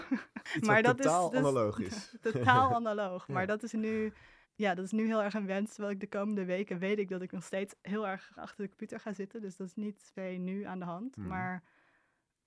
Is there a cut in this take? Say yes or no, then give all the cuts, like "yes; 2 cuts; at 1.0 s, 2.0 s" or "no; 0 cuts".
yes; 4 cuts; at 4.4 s, 7.8 s, 8.4 s, 10.1 s